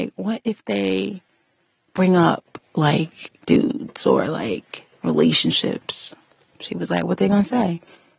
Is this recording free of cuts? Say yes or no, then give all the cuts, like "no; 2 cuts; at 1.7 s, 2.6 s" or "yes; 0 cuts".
no; 1 cut; at 3.4 s